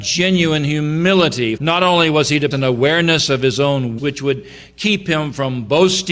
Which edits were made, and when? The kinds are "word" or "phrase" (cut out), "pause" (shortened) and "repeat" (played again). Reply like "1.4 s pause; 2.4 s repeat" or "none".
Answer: 1.6 s word; 2.5 s word; 4.0 s word